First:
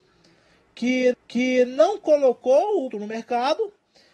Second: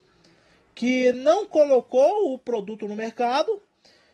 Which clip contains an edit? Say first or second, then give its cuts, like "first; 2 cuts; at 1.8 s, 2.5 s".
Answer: first; 2 cuts; at 1.1 s, 2.9 s